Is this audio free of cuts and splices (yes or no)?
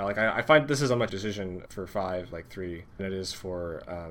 no